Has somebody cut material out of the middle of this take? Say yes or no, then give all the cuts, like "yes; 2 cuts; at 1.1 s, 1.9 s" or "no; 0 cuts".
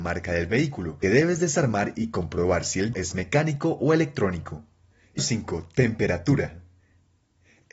yes; 3 cuts; at 1.0 s, 2.9 s, 5.2 s